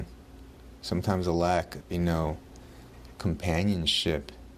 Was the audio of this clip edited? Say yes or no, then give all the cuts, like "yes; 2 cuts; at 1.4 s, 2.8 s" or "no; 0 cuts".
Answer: yes; 1 cut; at 1.8 s